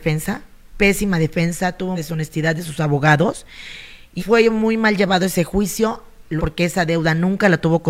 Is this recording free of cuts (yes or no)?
no